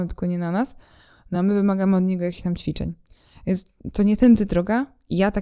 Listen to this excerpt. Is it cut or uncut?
uncut